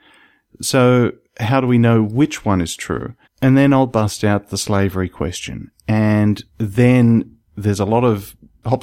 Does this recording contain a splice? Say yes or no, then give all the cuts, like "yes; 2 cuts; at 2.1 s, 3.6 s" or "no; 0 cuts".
yes; 2 cuts; at 3.2 s, 6.5 s